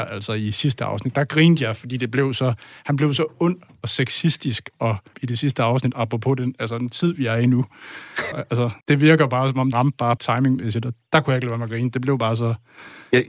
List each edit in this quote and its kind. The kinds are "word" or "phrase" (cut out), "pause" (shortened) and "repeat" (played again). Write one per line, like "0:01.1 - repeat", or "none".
0:05.1 - word
0:08.3 - phrase
0:08.8 - pause
0:09.7 - word
0:10.2 - word